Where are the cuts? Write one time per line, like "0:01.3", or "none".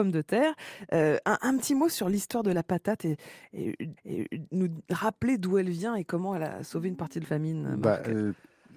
0:04.0
0:07.2